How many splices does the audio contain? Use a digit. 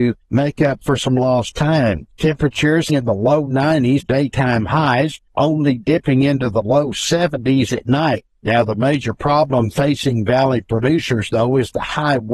2